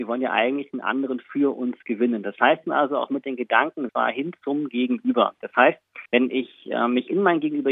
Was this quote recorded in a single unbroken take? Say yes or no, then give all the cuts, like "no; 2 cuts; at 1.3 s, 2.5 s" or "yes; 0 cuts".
no; 3 cuts; at 2.6 s, 3.9 s, 6.1 s